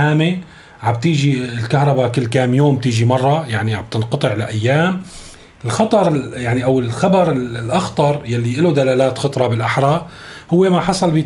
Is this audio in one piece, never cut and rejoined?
yes; 0 cuts

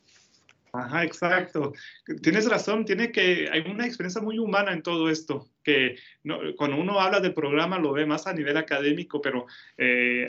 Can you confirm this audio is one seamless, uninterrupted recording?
yes; 0 cuts

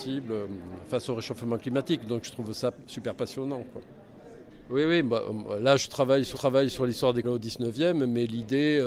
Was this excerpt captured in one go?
no; 2 cuts; at 6.3 s, 7.2 s

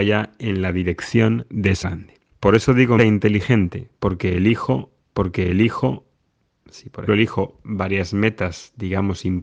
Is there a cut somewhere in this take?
yes; 5 cuts; at 1.8 s, 2.3 s, 3.0 s, 5.1 s, 7.1 s

